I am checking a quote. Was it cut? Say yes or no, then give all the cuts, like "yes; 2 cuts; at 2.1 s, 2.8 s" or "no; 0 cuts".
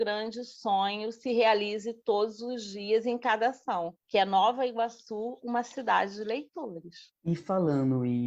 yes; 2 cuts; at 4.0 s, 7.2 s